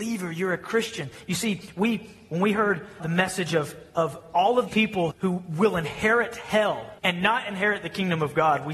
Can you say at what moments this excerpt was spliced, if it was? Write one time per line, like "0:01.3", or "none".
0:03.0
0:03.9
0:04.7
0:05.1
0:07.0